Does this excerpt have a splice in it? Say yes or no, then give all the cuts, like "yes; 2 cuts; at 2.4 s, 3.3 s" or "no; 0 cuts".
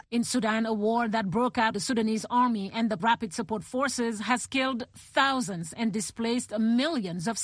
yes; 2 cuts; at 1.7 s, 3.0 s